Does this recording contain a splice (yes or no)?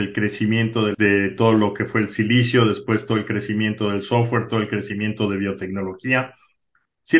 no